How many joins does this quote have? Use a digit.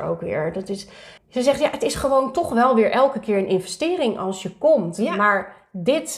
1